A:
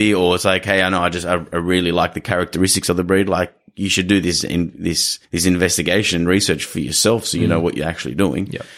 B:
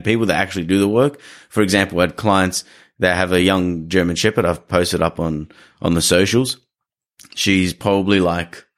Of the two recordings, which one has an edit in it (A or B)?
A